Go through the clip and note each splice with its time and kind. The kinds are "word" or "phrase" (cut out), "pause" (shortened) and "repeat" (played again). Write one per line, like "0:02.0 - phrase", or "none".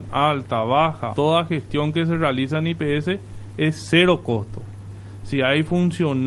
0:01.1 - word